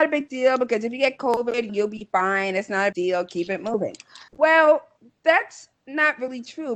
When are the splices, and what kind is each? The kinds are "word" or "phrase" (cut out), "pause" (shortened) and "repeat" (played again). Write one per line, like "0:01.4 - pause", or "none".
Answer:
0:01.7 - phrase
0:02.9 - word
0:04.3 - pause
0:05.7 - pause